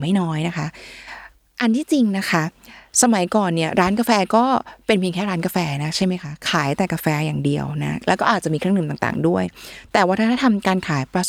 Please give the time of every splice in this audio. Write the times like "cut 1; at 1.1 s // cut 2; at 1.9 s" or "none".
none